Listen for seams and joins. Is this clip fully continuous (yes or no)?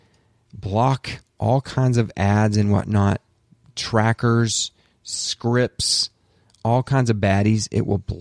yes